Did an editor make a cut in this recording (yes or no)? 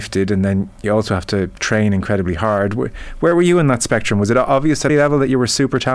yes